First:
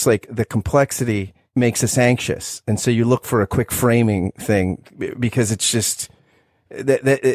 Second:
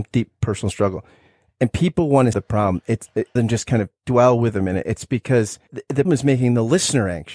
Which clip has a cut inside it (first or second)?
second